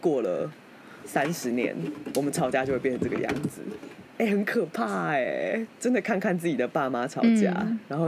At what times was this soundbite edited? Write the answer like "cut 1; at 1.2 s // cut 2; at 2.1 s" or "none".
cut 1; at 5.7 s